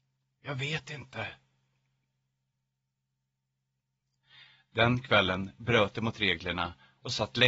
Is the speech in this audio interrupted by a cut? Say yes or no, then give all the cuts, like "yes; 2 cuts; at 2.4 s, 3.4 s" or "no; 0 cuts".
no; 0 cuts